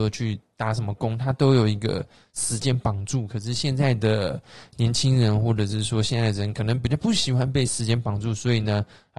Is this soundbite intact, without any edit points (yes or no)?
yes